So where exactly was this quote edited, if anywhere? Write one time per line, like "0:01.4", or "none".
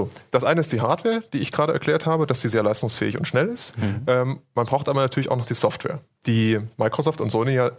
0:06.1